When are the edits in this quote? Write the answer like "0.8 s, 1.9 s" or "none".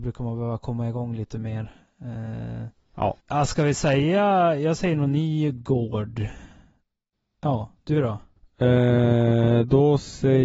3.2 s